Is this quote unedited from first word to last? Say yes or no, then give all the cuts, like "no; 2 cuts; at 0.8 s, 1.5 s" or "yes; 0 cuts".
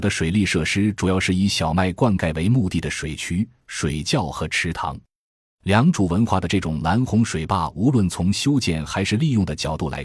yes; 0 cuts